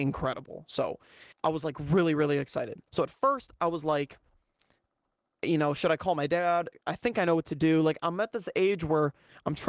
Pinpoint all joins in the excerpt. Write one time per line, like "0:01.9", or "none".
0:01.3
0:02.9